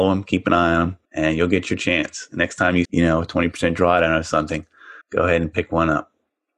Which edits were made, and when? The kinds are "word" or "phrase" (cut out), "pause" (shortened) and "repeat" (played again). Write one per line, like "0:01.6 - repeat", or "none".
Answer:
0:01.0 - pause
0:02.8 - word
0:05.0 - pause